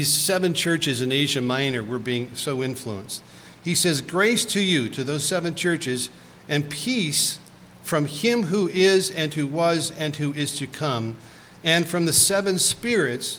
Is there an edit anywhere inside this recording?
no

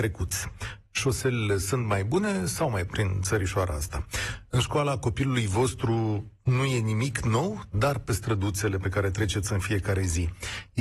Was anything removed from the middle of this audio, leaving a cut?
yes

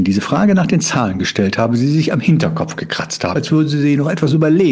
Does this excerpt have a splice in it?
yes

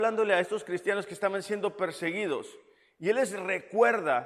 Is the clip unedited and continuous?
yes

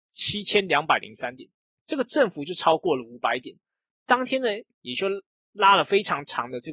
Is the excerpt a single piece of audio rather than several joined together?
yes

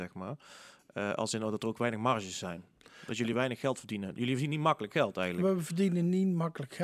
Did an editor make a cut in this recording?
no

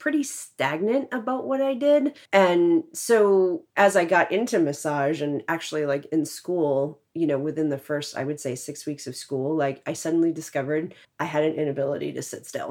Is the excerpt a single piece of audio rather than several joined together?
no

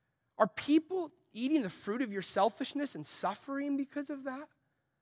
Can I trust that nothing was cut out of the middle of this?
yes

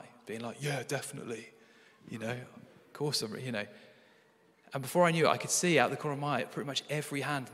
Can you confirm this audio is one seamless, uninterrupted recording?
yes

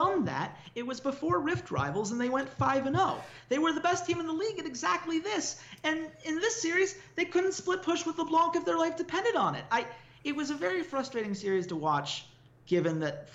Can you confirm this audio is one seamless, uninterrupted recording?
yes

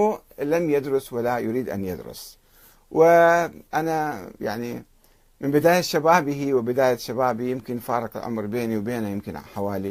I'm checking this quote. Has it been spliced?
no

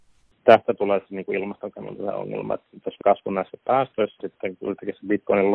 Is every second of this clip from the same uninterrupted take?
no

